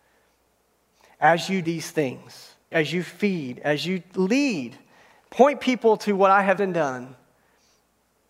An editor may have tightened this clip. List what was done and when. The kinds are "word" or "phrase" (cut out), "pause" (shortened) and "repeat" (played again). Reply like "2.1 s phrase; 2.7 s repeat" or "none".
1.6 s word; 2.7 s word; 6.6 s word